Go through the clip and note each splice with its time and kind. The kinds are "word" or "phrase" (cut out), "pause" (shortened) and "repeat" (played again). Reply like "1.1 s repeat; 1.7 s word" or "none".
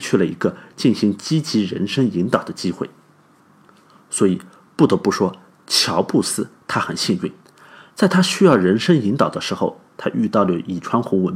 none